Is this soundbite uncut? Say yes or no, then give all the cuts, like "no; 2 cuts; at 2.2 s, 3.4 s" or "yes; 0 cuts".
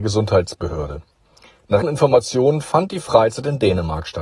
no; 1 cut; at 1.8 s